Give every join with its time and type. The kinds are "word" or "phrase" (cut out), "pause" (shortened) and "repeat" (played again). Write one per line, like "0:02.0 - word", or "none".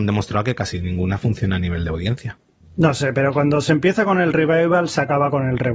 none